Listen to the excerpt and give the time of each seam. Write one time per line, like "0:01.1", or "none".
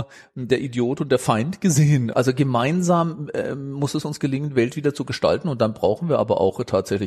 none

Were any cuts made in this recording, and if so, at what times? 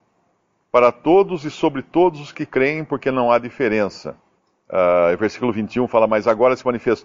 0:04.4

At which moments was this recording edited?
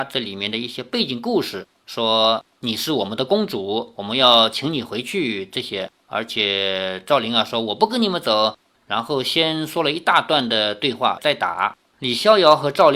none

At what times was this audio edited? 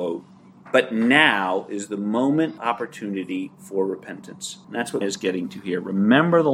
0:02.6
0:04.6
0:05.0

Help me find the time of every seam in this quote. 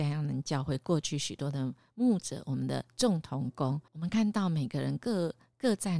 0:03.9

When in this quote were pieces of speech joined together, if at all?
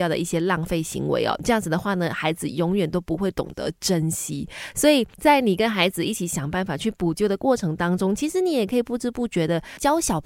0:05.1

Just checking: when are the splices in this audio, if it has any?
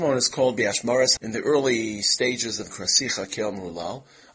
0:01.2
0:02.7

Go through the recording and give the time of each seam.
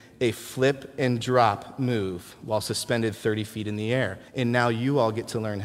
0:04.3

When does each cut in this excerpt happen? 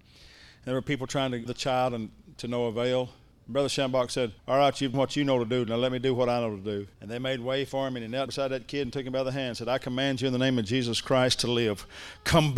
0:01.5
0:03.3
0:04.4
0:04.9
0:06.9
0:08.3

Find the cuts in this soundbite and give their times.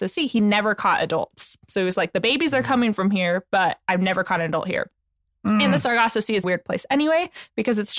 0:06.4

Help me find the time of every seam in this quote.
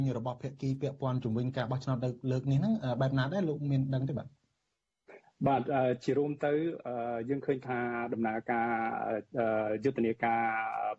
none

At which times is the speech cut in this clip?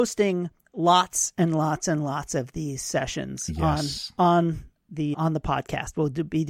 0:05.1

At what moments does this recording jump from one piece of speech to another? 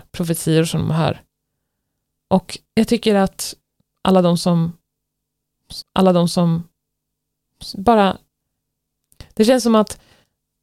0:02.7
0:05.8

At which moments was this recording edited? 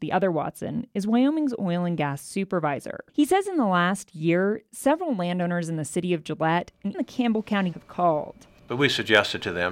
0:03.1
0:06.9
0:07.7

